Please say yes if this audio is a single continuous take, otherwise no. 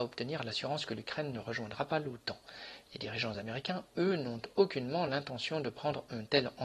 yes